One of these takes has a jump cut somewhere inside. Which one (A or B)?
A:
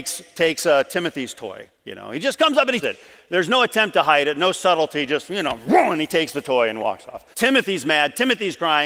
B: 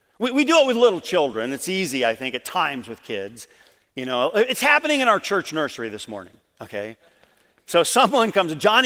A